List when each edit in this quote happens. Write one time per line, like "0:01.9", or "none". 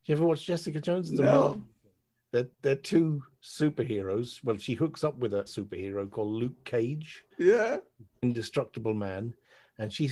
0:02.5
0:05.5
0:07.3

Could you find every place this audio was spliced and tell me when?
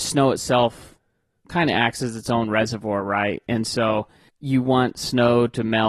none

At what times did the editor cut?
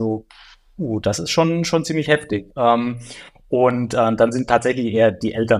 0:02.5

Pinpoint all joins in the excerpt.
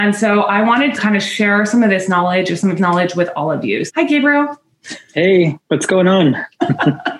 0:00.9
0:02.8
0:03.9

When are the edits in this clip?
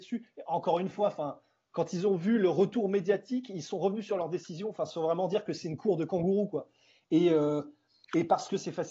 none

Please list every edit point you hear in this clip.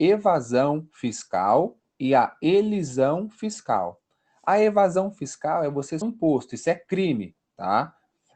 0:01.9
0:06.0

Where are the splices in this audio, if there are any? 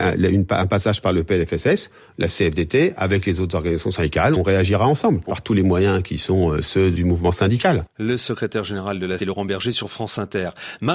0:04.3
0:05.3
0:06.9
0:09.2

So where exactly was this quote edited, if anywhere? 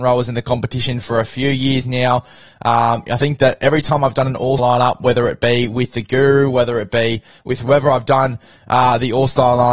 0:04.6

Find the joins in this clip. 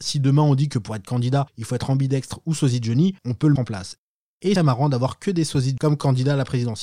0:01.5
0:03.2
0:03.6
0:04.6
0:05.8

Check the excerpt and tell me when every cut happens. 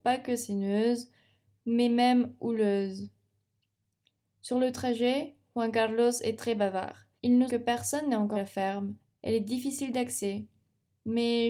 0:07.2
0:07.5
0:08.3
0:09.0

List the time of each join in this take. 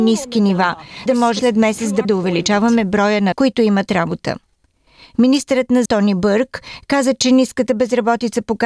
0:01.1
0:01.4
0:02.0
0:03.3
0:05.9

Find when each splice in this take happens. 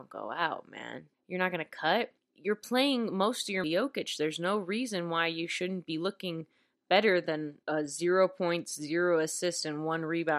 0:01.1
0:02.2
0:03.6
0:07.6

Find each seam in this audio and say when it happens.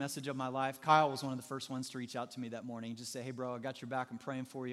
none

